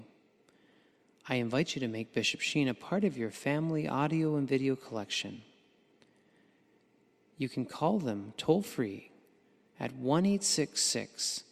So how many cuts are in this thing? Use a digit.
0